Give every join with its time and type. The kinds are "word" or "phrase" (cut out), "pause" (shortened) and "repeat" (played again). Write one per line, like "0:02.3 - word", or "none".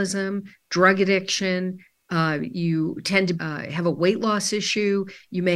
0:03.4 - word